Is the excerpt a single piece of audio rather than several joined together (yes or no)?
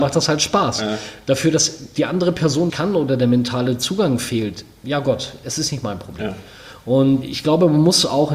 no